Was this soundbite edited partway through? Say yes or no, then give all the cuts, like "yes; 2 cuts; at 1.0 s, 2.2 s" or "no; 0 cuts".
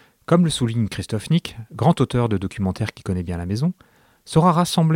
no; 0 cuts